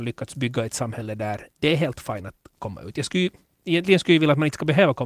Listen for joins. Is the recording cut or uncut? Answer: cut